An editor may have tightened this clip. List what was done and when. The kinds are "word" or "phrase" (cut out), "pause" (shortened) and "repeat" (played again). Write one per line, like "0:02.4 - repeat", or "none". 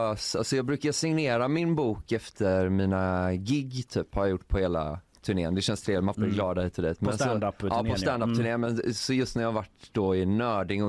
0:06.1 - phrase